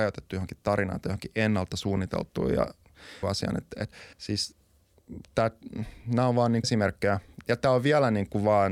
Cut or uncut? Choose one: cut